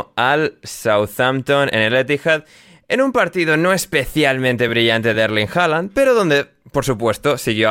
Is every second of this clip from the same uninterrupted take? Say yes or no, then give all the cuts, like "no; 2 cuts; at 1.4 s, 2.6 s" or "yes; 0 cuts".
yes; 0 cuts